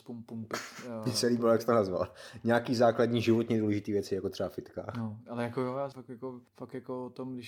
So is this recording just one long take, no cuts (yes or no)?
no